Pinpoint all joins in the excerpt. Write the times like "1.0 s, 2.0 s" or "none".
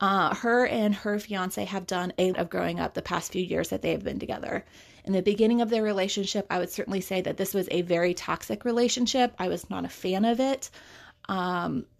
2.3 s